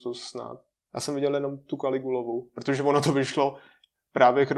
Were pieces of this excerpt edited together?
no; 0 cuts

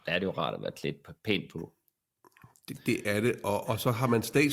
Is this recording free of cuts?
yes; 0 cuts

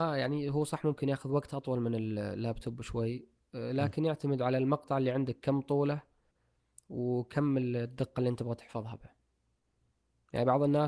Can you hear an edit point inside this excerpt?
no; 0 cuts

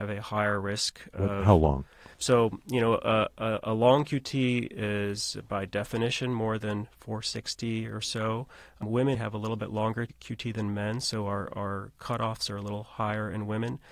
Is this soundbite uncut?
no; 2 cuts; at 2.1 s, 9.1 s

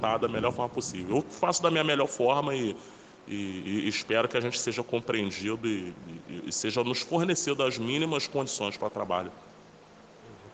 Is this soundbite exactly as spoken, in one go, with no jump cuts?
yes; 0 cuts

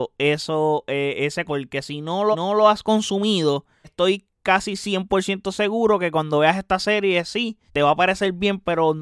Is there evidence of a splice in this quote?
yes; 4 cuts; at 1.5 s, 2.3 s, 3.8 s, 7.7 s

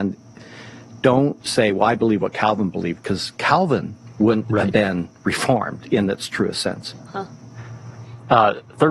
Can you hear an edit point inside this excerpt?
yes; 1 cut; at 1.4 s

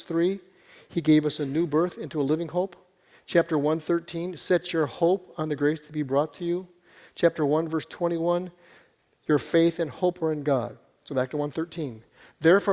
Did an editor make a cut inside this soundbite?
no; 0 cuts

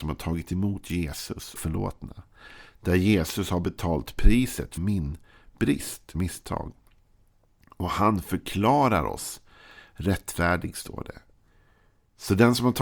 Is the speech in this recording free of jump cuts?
no; 3 cuts; at 1.6 s, 4.8 s, 6.1 s

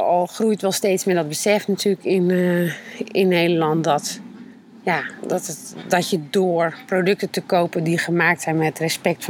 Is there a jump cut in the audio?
no; 0 cuts

